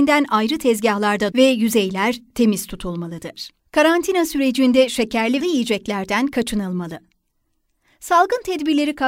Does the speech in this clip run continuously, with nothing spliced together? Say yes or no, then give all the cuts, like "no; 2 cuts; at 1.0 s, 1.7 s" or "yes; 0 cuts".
no; 3 cuts; at 1.3 s, 3.6 s, 5.4 s